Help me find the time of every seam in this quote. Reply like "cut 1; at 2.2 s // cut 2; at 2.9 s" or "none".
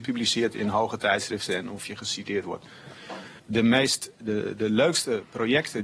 cut 1; at 3.4 s